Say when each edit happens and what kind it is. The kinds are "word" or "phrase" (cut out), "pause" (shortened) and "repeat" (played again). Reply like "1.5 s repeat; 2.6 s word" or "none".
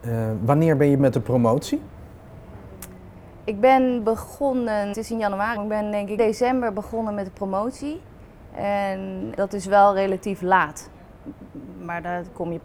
1.0 s word; 4.9 s word; 5.6 s word; 6.2 s word; 9.4 s word